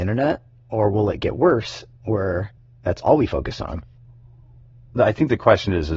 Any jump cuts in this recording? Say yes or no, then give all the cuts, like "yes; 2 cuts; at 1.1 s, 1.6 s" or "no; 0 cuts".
no; 0 cuts